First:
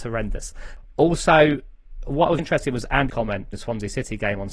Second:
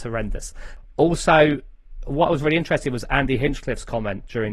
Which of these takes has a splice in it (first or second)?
first